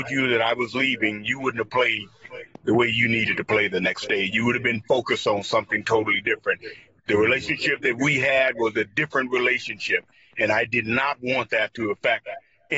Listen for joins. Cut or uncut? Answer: uncut